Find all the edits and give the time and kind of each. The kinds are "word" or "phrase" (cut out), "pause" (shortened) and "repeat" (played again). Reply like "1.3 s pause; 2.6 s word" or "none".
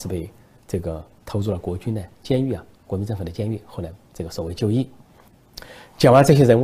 4.1 s pause